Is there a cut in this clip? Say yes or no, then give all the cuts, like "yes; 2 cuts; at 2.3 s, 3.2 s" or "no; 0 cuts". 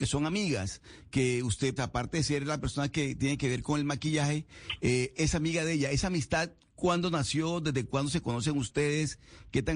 yes; 1 cut; at 1.8 s